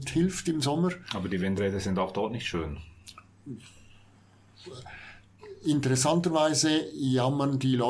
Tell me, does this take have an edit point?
no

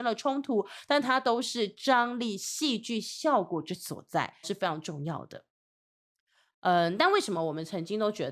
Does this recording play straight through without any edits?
no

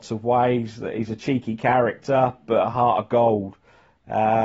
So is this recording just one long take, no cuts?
yes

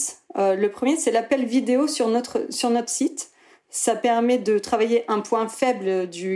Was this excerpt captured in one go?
yes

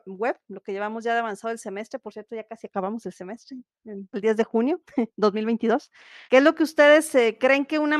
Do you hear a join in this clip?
yes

